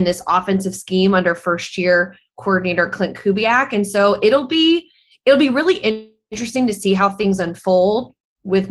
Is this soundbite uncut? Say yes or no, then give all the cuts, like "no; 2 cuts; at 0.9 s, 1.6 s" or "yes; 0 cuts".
yes; 0 cuts